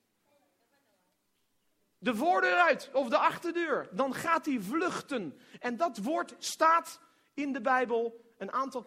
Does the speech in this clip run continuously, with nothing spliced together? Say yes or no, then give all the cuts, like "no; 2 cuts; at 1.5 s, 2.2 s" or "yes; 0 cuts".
yes; 0 cuts